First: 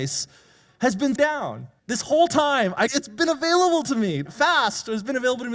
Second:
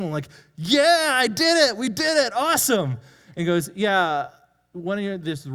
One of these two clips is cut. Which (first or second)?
first